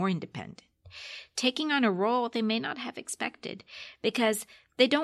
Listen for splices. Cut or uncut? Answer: uncut